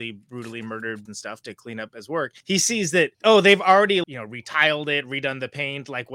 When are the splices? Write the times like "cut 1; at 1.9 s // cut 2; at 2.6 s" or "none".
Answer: cut 1; at 1.1 s // cut 2; at 2.4 s // cut 3; at 3.1 s // cut 4; at 4.0 s